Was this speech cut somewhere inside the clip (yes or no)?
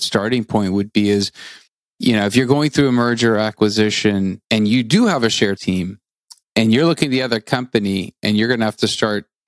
yes